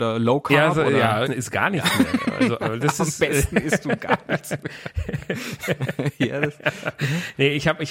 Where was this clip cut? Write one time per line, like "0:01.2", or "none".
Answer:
0:01.3